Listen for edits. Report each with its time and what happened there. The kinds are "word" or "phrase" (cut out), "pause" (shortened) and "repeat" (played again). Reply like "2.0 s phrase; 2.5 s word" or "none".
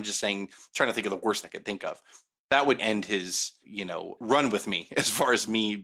1.4 s word; 2.8 s word; 3.6 s word; 4.2 s word